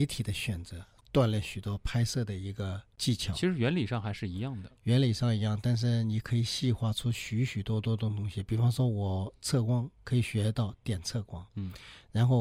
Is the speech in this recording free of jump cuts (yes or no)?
no